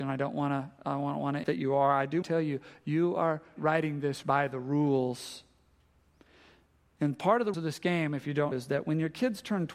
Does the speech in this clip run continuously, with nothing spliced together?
no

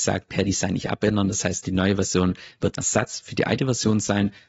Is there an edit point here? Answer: yes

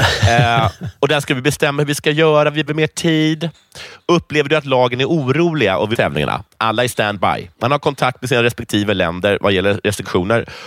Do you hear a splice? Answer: yes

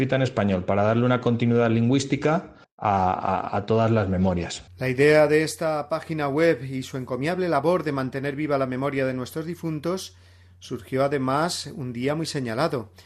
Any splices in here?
yes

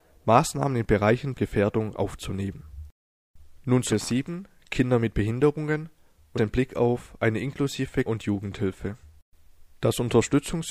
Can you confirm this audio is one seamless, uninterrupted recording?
no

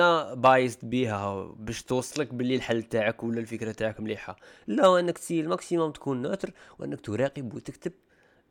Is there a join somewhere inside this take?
no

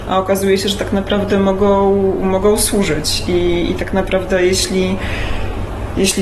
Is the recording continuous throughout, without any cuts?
yes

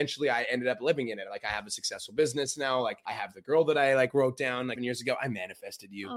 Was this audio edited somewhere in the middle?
yes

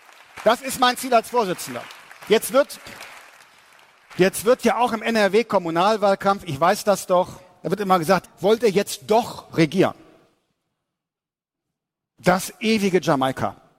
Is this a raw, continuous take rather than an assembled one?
no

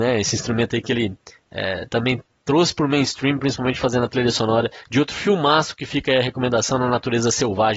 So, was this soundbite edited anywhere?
no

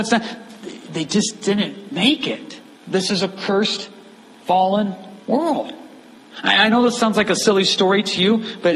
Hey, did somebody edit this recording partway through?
yes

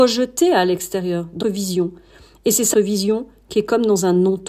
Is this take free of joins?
no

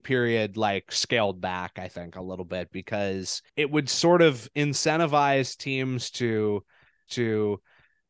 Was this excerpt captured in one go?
no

